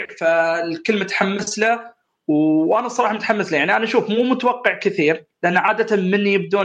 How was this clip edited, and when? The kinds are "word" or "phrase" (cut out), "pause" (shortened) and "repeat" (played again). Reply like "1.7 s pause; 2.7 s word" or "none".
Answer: none